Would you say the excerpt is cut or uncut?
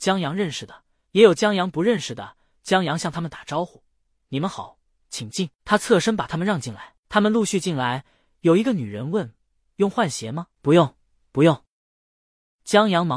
uncut